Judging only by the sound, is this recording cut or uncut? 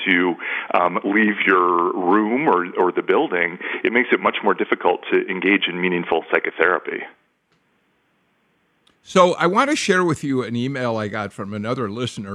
uncut